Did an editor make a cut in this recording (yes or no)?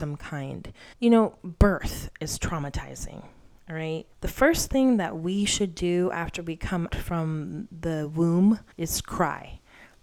yes